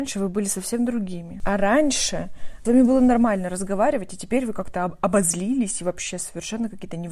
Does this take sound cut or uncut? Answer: cut